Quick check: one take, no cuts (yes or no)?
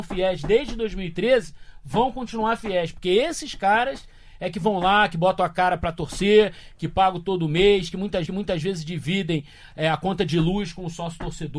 no